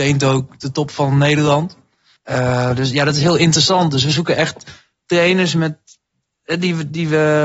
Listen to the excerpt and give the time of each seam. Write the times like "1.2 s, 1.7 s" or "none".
none